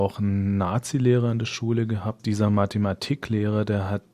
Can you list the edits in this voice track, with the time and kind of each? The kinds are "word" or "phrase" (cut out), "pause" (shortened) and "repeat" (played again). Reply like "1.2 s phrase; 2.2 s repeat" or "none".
none